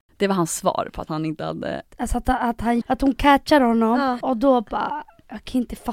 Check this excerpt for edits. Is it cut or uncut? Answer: cut